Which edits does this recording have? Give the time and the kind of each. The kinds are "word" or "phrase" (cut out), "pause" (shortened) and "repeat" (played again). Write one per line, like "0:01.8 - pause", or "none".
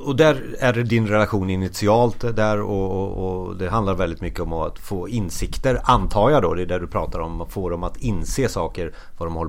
none

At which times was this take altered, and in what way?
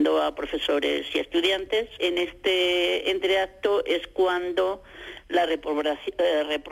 none

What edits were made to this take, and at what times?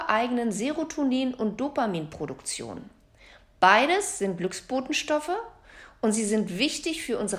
none

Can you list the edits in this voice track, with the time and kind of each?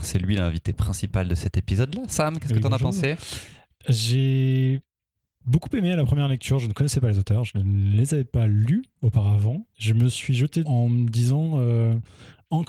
0:03.8 - word
0:10.7 - word

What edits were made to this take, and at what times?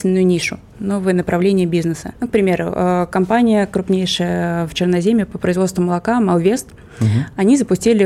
none

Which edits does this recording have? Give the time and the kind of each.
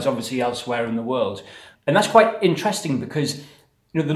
none

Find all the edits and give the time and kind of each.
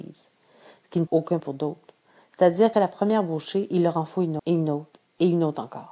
0:01.1 - word
0:01.4 - word
0:02.7 - word
0:04.4 - word

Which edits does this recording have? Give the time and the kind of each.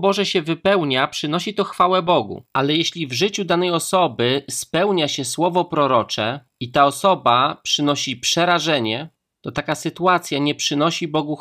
0:02.5 - pause

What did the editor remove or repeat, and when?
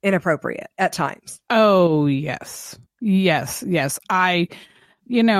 0:02.9 - pause

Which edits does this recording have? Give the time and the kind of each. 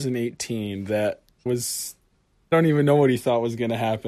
0:01.5 - word
0:02.5 - word

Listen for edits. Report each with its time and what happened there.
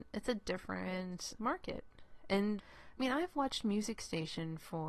0:01.4 - word
0:02.6 - word

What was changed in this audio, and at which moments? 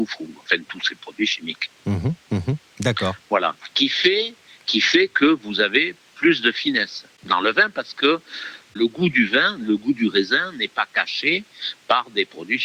none

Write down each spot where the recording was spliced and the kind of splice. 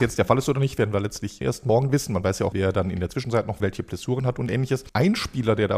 0:01.4 - word
0:02.5 - word
0:03.6 - phrase
0:04.9 - pause

